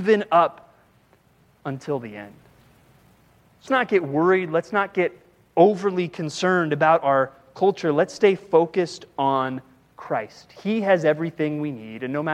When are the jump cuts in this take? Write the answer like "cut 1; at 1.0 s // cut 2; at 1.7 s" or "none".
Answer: cut 1; at 3.7 s